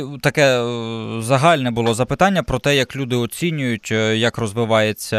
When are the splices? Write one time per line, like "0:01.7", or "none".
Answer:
none